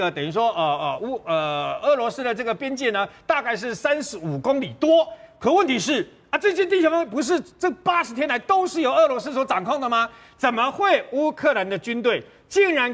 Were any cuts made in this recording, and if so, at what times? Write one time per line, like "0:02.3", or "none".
none